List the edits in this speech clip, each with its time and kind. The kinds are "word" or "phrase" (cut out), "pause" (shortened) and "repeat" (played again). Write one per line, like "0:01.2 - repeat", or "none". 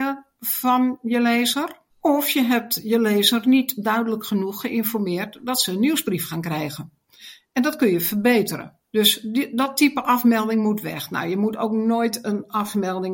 0:01.9 - pause
0:08.8 - pause